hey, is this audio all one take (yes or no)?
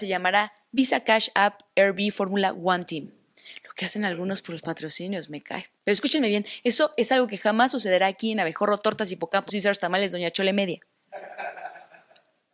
no